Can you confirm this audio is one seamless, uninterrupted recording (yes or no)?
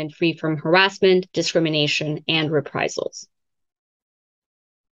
no